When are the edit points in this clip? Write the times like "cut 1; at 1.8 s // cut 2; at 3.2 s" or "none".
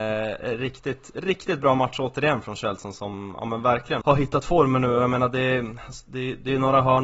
cut 1; at 4.0 s